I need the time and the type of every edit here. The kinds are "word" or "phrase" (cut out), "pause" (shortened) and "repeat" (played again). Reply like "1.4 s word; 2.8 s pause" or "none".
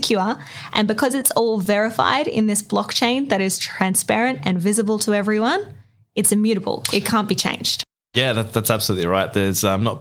none